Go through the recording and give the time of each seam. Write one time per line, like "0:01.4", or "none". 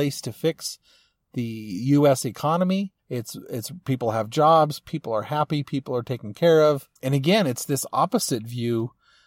0:03.0
0:07.0